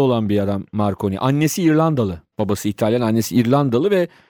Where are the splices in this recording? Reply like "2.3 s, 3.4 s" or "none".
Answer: 2.3 s